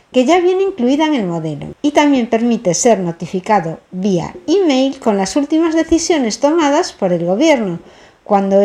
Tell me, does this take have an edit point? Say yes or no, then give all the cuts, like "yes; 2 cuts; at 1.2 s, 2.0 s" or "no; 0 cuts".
no; 0 cuts